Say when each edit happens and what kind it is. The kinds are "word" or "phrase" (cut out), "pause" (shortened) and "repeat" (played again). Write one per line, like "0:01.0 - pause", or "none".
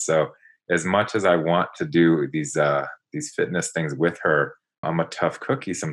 0:04.8 - word